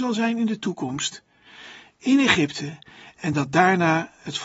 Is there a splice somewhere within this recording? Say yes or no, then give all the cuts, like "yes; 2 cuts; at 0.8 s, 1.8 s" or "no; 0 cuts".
no; 0 cuts